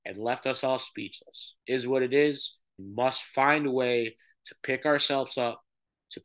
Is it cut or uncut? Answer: cut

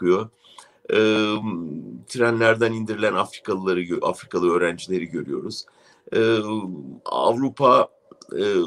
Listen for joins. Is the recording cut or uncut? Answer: uncut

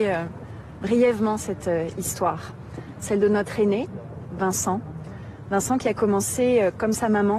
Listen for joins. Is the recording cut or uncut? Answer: uncut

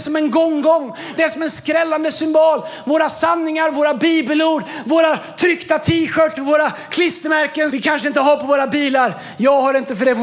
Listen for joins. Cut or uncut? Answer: cut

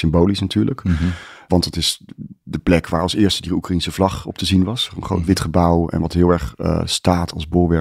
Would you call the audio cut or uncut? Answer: uncut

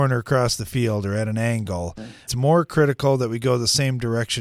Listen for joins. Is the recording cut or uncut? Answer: cut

